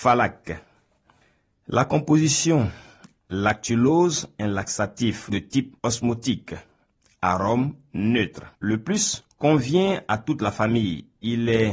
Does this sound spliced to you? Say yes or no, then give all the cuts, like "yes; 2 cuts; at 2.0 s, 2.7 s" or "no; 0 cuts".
yes; 5 cuts; at 3.2 s, 5.3 s, 5.8 s, 8.6 s, 9.3 s